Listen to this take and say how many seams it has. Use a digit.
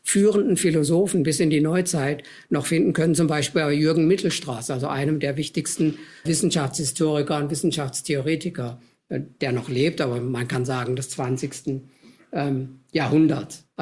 1